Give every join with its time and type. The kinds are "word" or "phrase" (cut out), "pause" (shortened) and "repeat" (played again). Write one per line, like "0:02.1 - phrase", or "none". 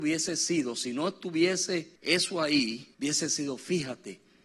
0:02.0 - pause
0:02.9 - pause

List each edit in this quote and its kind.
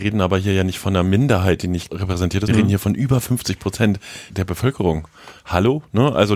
0:01.9 - word
0:02.5 - word
0:04.3 - word

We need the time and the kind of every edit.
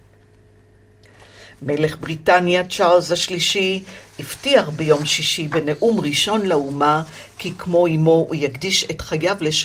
none

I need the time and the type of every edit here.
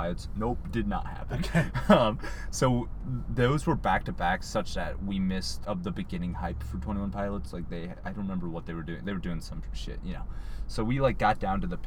0:05.6 - word

